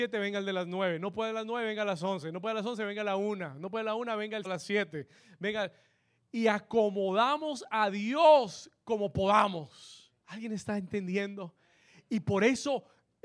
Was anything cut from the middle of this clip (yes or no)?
yes